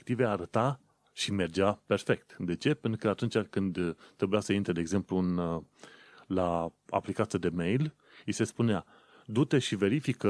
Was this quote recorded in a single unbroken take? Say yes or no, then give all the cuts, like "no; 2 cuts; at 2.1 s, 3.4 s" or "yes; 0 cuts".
yes; 0 cuts